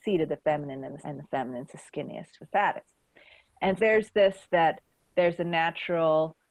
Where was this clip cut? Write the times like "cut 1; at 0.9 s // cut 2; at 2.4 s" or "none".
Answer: cut 1; at 1.0 s // cut 2; at 2.4 s // cut 3; at 3.8 s // cut 4; at 4.4 s